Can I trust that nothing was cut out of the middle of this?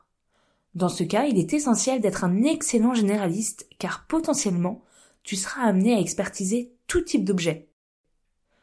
yes; 0 cuts

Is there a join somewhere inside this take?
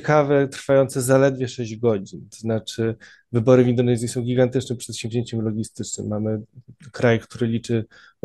no; 0 cuts

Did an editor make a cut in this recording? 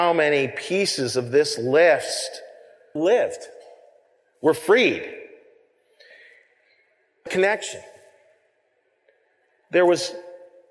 yes; 2 cuts; at 3.0 s, 7.3 s

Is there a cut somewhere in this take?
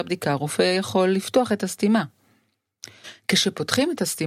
no; 0 cuts

